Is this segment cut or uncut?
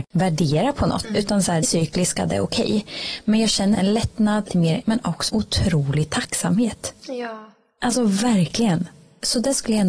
cut